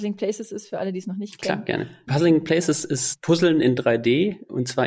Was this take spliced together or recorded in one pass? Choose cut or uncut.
uncut